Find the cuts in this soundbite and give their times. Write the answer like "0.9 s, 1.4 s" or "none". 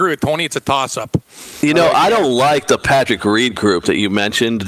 none